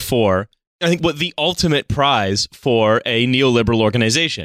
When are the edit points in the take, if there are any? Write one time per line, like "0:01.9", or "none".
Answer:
none